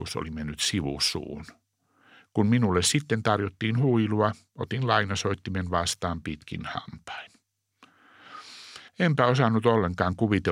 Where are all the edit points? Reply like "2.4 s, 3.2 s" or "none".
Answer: 8.9 s